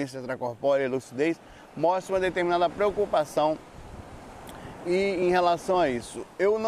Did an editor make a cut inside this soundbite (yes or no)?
no